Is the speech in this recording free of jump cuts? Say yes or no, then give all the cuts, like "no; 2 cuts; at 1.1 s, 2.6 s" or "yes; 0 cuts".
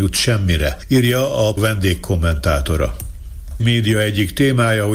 no; 2 cuts; at 1.6 s, 3.6 s